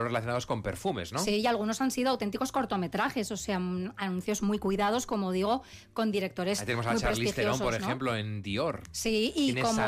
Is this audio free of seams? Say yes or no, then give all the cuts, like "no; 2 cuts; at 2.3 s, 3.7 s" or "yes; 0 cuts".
yes; 0 cuts